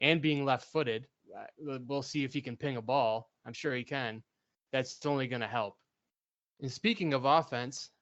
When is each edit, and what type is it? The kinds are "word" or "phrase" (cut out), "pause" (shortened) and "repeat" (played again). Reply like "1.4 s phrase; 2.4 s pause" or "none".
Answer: none